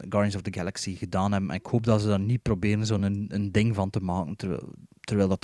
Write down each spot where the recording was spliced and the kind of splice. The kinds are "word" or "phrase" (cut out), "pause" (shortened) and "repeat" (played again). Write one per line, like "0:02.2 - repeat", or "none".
none